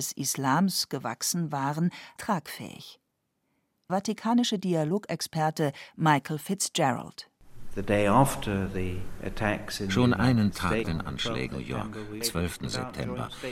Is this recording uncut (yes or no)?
no